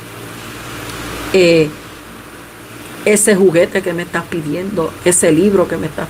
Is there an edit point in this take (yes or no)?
no